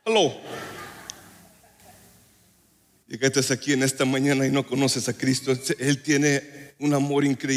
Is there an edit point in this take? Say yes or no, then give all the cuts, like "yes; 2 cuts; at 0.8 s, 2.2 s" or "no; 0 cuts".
no; 0 cuts